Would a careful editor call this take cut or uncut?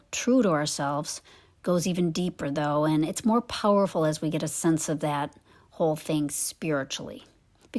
uncut